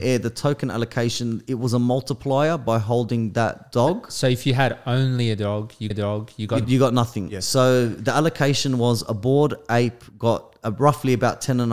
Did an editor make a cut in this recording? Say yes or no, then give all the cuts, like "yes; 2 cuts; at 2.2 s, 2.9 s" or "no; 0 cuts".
yes; 2 cuts; at 5.9 s, 6.6 s